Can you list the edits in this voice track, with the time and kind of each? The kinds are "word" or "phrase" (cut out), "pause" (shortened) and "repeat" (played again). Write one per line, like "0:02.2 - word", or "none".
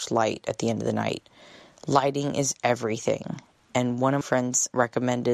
0:04.2 - word